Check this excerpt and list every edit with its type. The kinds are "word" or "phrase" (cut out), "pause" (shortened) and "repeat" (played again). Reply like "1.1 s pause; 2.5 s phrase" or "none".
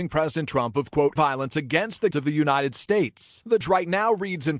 1.2 s word; 2.1 s word; 3.6 s word